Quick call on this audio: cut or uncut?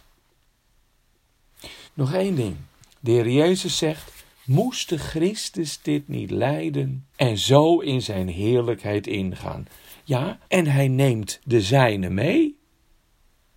cut